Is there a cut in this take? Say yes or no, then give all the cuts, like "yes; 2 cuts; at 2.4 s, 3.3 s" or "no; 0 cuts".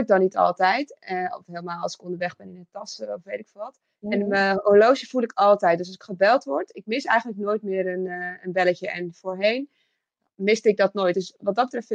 no; 0 cuts